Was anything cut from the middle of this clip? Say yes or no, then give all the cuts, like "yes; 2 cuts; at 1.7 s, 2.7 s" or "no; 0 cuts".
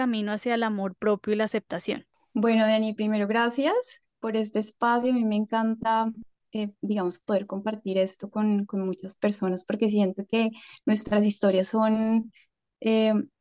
no; 0 cuts